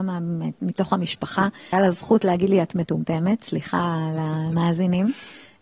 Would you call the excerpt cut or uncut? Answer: cut